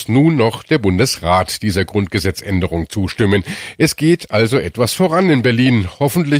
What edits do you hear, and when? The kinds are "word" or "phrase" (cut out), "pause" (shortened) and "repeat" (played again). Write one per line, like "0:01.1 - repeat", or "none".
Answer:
none